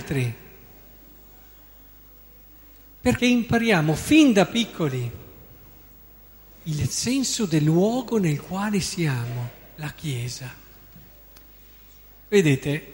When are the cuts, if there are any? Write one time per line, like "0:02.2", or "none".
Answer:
0:03.2